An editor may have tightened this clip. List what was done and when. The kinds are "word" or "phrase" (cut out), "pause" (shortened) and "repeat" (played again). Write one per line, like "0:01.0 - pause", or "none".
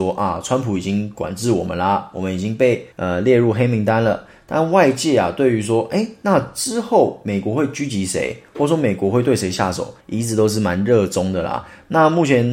0:02.9 - pause
0:10.0 - pause